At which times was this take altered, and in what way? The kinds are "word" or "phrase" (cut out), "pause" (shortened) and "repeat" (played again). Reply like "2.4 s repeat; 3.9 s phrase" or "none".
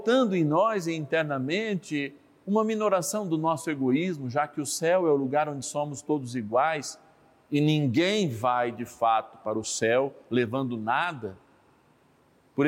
none